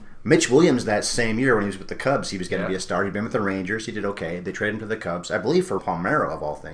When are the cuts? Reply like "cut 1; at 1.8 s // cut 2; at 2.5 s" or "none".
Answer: cut 1; at 5.8 s